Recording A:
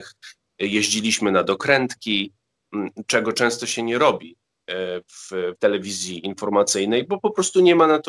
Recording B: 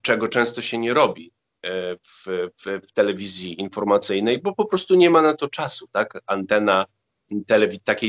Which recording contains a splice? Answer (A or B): A